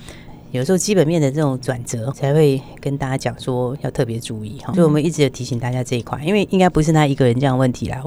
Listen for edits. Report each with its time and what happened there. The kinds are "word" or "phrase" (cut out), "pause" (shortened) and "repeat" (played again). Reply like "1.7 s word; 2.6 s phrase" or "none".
2.1 s phrase; 4.7 s word